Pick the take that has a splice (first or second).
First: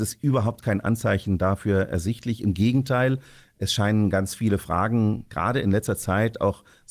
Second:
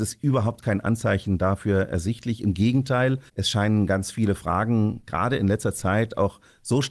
second